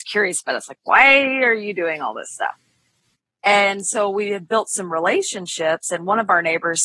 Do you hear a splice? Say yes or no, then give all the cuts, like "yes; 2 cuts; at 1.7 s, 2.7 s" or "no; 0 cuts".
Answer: no; 0 cuts